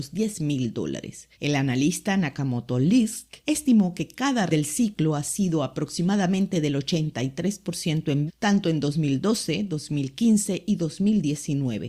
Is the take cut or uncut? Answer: cut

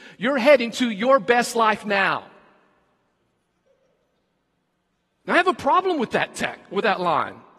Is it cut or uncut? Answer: uncut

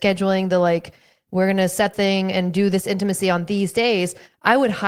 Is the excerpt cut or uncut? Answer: cut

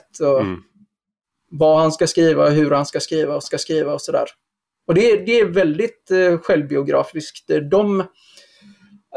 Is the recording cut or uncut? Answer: cut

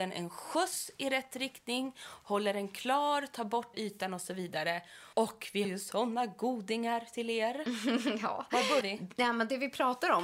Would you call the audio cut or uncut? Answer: cut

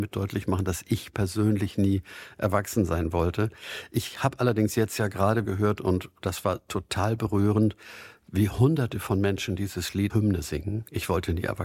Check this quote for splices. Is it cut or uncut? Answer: cut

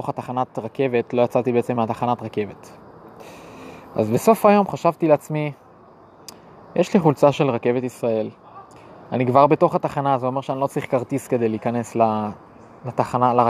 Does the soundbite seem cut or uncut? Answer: uncut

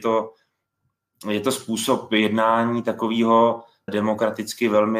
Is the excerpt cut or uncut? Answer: cut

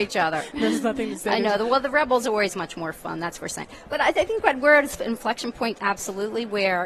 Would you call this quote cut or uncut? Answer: uncut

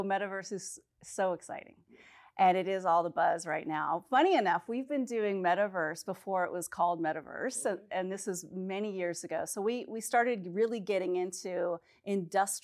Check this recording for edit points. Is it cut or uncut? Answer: uncut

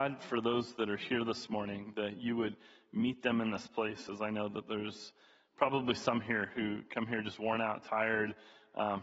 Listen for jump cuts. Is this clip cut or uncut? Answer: uncut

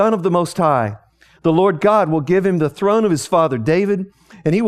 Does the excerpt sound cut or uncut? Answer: uncut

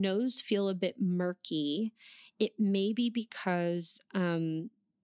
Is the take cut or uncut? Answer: uncut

